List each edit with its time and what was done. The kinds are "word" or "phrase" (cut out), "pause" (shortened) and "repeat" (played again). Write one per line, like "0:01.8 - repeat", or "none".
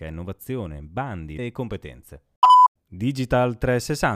0:01.4 - word